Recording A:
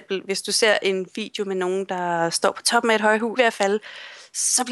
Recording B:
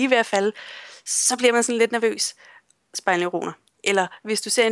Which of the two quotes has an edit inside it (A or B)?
A